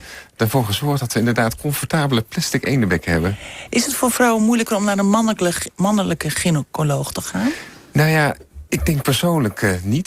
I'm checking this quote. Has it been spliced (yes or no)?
yes